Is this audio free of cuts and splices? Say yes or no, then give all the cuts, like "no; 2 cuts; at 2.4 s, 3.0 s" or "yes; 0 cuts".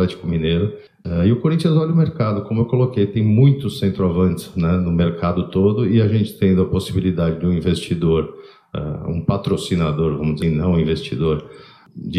no; 1 cut; at 10.4 s